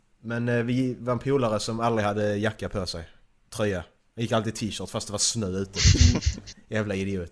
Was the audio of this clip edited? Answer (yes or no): no